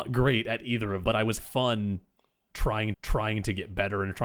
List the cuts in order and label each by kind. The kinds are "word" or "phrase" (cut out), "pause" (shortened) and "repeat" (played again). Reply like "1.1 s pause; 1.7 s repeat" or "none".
1.0 s word; 1.4 s word; 2.9 s repeat